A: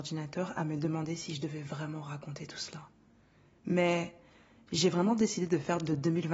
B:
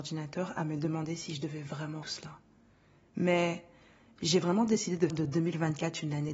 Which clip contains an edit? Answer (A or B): B